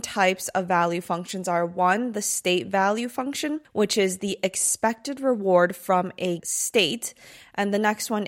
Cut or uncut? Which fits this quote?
cut